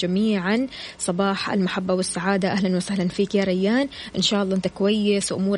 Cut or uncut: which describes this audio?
uncut